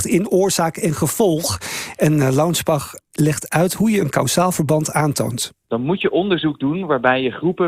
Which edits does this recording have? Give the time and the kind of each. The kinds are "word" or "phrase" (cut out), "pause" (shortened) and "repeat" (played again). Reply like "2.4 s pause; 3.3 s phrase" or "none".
none